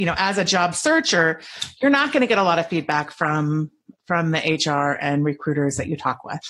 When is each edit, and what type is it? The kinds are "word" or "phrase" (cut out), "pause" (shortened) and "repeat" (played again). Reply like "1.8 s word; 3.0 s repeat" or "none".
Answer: none